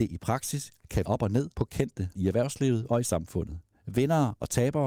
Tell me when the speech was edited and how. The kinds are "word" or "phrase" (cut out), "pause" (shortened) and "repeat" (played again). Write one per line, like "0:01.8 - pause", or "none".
0:01.0 - word
0:01.5 - pause
0:02.1 - word
0:03.7 - pause